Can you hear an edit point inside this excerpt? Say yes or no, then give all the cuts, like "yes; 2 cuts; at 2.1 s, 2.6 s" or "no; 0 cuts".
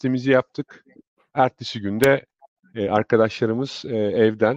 no; 0 cuts